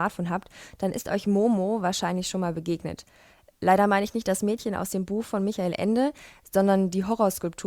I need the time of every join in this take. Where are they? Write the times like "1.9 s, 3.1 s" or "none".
none